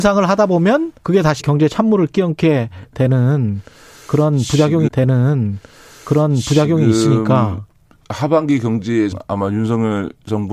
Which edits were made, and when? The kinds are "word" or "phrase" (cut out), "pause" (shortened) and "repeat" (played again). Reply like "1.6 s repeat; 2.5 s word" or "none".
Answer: 1.0 s pause; 1.4 s word; 4.9 s repeat; 9.1 s word